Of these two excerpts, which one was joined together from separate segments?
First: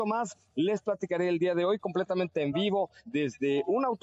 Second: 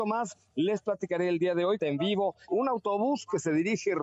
second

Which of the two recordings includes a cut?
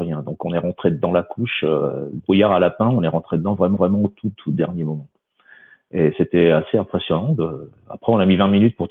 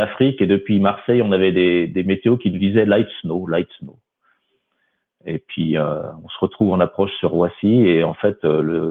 first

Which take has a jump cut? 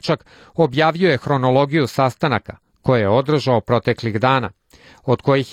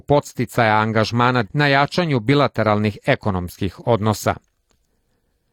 second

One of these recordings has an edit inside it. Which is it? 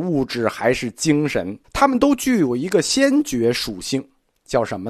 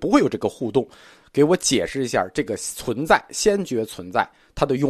first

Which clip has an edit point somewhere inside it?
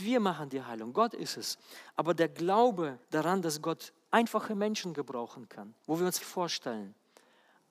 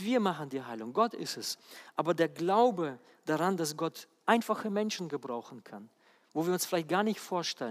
first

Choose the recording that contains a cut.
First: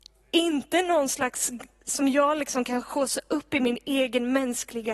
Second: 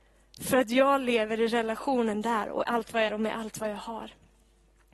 second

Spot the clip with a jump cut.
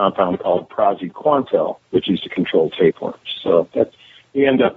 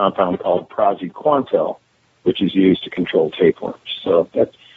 first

